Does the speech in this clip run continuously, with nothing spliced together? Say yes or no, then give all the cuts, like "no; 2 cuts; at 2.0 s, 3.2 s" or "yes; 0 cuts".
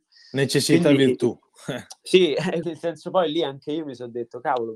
no; 1 cut; at 2.6 s